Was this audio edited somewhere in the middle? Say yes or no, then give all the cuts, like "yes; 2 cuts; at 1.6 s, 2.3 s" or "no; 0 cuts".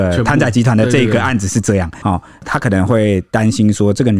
yes; 1 cut; at 2.0 s